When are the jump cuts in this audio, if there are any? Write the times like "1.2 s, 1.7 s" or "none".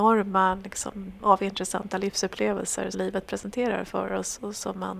1.2 s, 2.9 s